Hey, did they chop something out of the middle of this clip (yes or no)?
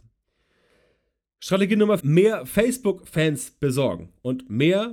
yes